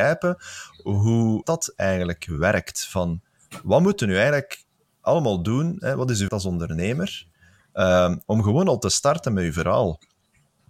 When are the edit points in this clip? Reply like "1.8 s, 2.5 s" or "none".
1.4 s, 6.3 s